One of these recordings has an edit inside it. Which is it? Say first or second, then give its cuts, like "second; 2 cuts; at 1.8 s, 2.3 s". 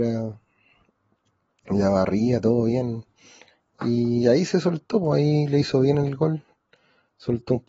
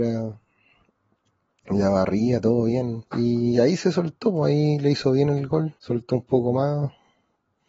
second; 2 cuts; at 3.1 s, 5.8 s